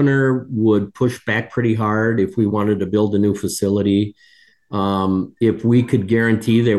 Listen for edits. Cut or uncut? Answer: uncut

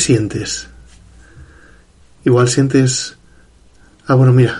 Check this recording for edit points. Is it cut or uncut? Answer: uncut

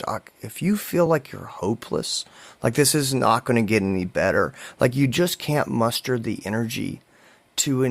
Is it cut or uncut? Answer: uncut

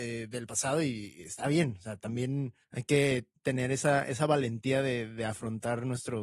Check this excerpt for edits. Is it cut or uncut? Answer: cut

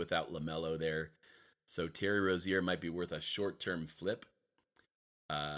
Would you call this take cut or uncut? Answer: uncut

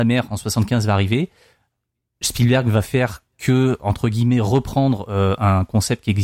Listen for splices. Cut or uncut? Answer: uncut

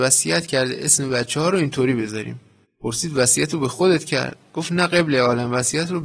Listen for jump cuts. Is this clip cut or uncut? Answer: cut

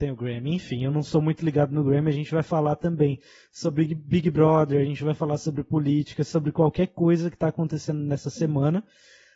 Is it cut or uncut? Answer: uncut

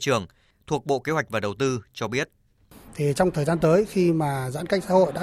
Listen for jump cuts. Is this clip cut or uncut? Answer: uncut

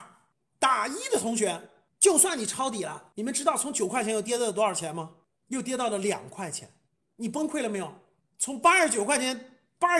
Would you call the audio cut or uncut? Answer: uncut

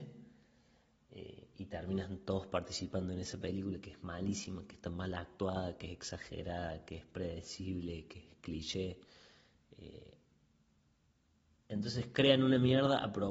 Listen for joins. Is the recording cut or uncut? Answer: uncut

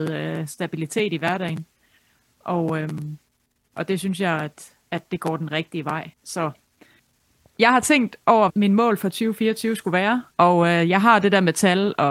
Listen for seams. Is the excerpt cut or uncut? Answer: cut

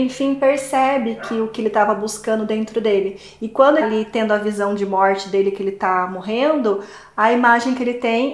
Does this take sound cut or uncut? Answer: cut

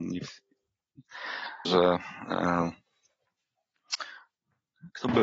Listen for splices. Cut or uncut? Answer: cut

